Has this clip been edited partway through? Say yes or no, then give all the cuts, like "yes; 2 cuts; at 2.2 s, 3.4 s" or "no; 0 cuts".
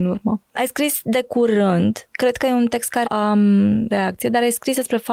yes; 3 cuts; at 2.1 s, 3.0 s, 3.9 s